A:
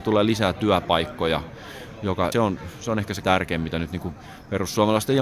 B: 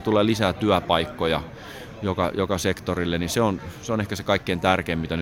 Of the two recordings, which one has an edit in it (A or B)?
A